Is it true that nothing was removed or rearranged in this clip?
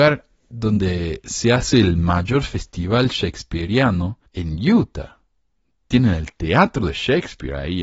no; 2 cuts; at 4.3 s, 5.4 s

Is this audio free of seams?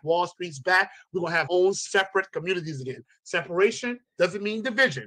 no; 1 cut; at 1.5 s

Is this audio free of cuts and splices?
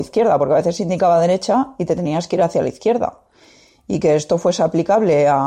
yes; 0 cuts

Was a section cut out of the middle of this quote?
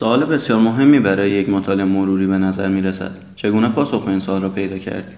no; 0 cuts

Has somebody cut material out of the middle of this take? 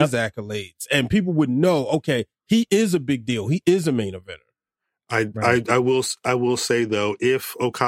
no; 0 cuts

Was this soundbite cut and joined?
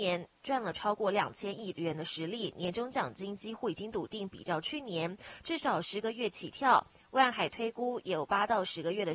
no; 0 cuts

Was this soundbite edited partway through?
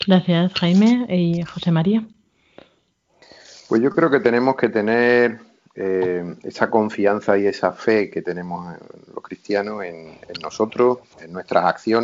no; 0 cuts

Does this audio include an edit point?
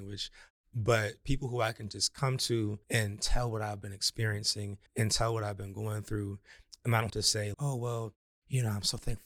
yes; 4 cuts; at 2.8 s, 4.9 s, 7.1 s, 7.5 s

